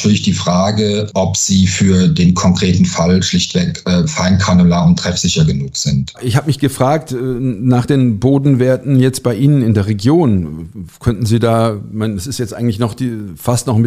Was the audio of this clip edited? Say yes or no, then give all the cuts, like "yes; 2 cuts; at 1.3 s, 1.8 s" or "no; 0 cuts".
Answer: no; 0 cuts